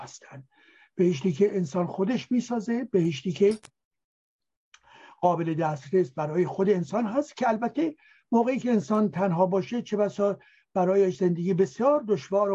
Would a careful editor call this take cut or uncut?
uncut